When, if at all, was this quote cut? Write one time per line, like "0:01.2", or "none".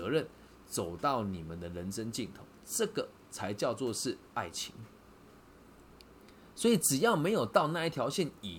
0:04.3